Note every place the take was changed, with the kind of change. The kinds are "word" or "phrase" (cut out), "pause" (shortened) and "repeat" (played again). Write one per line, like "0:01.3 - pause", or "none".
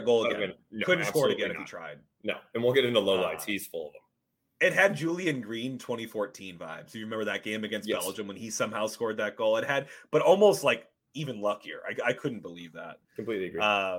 none